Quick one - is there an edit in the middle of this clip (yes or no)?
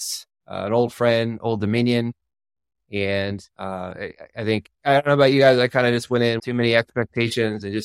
yes